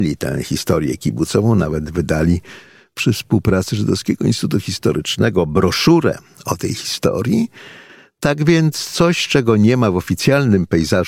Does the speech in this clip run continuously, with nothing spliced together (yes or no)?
yes